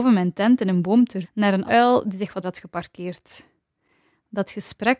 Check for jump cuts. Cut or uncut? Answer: cut